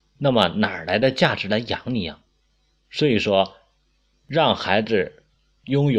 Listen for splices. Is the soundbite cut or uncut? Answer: uncut